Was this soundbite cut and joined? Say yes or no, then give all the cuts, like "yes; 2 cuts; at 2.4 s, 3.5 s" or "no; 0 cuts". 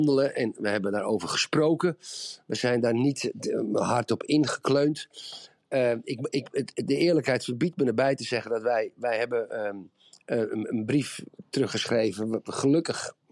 no; 0 cuts